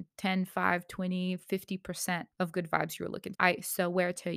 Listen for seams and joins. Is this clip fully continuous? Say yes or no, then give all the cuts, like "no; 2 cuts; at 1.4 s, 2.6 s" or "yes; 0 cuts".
no; 2 cuts; at 2.3 s, 3.3 s